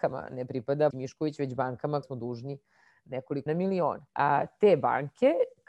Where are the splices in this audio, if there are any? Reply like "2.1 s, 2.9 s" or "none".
0.9 s, 2.0 s, 3.5 s, 4.1 s